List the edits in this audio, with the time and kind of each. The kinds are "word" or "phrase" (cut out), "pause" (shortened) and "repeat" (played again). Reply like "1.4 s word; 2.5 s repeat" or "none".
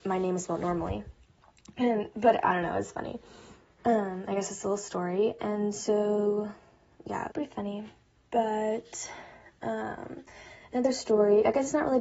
7.3 s phrase